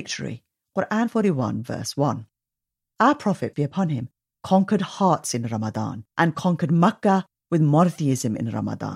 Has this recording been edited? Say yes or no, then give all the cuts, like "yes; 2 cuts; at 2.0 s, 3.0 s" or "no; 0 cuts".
yes; 2 cuts; at 3.5 s, 6.1 s